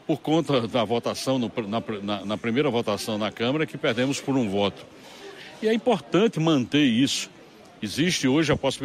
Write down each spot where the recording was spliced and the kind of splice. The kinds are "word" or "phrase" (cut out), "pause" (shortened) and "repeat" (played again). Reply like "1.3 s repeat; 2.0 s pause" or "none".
none